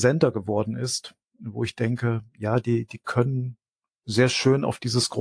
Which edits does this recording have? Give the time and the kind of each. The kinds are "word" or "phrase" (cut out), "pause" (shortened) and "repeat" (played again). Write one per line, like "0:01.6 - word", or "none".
none